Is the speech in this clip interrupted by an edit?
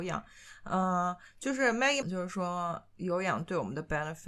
yes; 1 cut; at 2.0 s

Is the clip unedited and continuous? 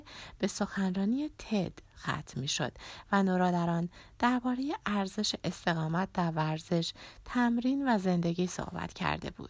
yes; 0 cuts

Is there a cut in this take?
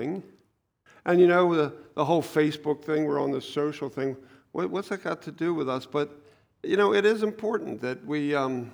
no; 0 cuts

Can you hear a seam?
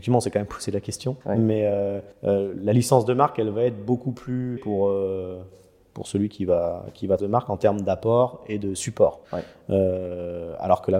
yes; 5 cuts; at 1.2 s, 2.1 s, 4.6 s, 7.2 s, 9.2 s

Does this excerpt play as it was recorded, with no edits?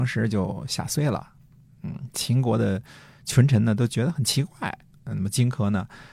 yes; 0 cuts

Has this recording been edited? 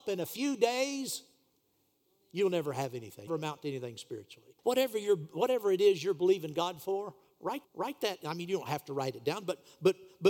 yes; 3 cuts; at 3.3 s, 4.6 s, 7.6 s

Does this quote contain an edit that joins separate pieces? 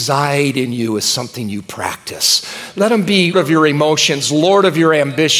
yes; 1 cut; at 3.3 s

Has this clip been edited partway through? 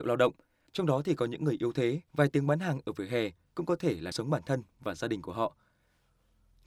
yes; 2 cuts; at 2.1 s, 4.1 s

